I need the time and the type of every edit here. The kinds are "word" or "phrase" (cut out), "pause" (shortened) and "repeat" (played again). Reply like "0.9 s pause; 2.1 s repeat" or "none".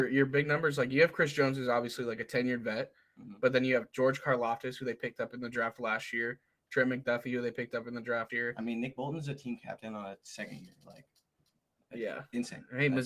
8.3 s word